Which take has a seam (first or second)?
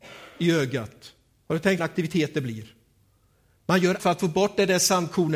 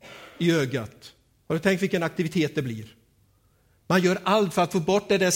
first